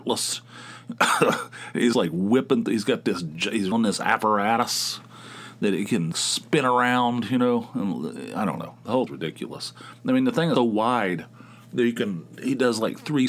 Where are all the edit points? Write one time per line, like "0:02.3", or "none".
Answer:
0:01.9
0:03.7
0:06.1
0:09.1
0:10.6